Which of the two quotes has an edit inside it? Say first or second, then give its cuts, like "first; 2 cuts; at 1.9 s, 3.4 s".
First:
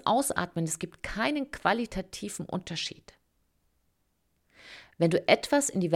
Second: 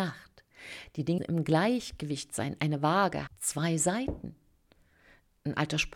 second; 2 cuts; at 1.2 s, 3.3 s